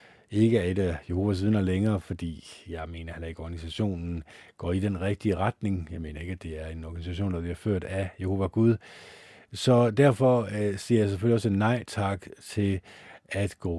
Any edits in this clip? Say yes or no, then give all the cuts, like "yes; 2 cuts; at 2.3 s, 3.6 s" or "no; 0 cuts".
no; 0 cuts